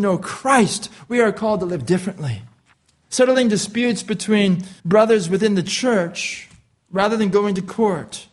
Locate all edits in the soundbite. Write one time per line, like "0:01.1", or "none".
0:02.7
0:04.8